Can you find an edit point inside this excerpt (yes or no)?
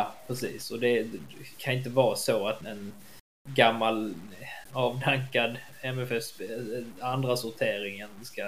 yes